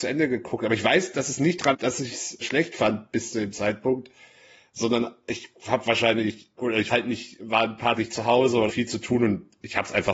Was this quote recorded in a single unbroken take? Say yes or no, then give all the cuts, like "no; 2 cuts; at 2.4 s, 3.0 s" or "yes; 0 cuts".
no; 6 cuts; at 1.7 s, 2.4 s, 6.6 s, 6.9 s, 8.0 s, 8.7 s